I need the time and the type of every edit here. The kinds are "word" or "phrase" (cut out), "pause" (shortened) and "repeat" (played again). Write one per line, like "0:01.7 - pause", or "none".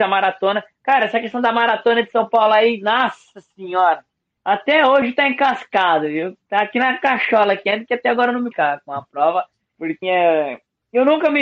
0:08.5 - word
0:10.0 - word